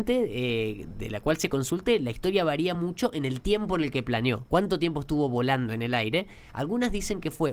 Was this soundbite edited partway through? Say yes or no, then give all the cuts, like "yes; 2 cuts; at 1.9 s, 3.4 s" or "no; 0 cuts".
no; 0 cuts